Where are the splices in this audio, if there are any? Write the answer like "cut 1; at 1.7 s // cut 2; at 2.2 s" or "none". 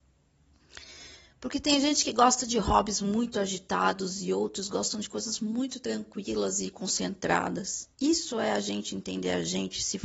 cut 1; at 7.9 s